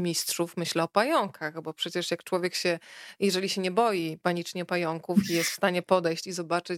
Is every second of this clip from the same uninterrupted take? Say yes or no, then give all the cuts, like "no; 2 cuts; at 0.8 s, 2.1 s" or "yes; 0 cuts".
yes; 0 cuts